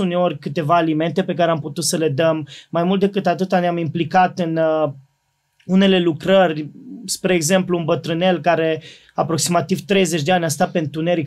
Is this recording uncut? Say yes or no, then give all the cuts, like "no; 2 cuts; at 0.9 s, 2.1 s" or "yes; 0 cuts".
yes; 0 cuts